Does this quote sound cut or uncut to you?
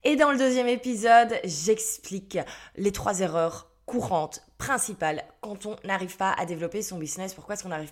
uncut